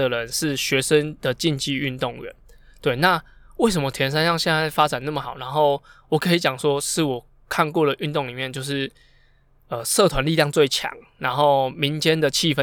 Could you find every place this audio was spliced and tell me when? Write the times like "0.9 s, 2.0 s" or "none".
none